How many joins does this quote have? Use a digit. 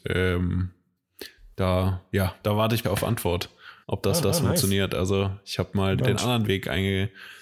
6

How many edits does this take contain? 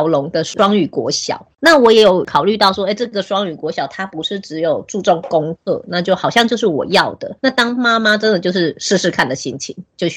1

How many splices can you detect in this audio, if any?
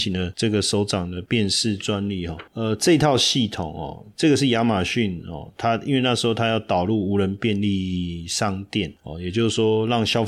0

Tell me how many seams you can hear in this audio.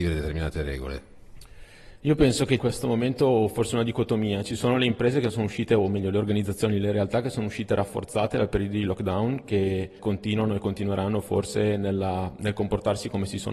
2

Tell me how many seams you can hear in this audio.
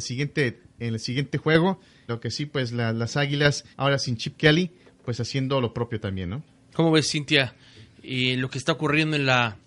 2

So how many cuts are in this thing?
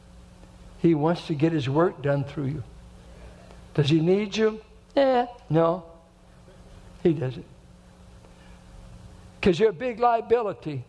0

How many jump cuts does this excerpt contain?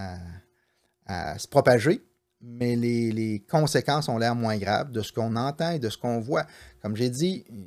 0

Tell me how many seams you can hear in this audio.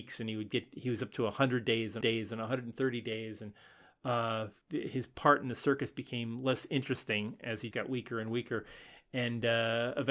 3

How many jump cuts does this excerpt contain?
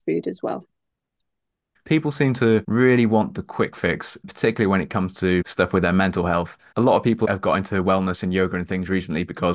0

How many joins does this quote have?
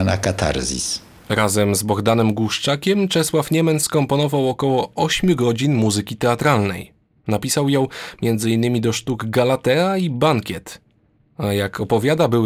0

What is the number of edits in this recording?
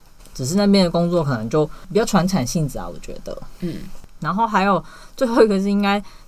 0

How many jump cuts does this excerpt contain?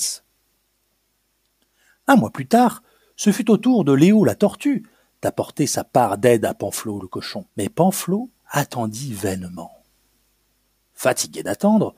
2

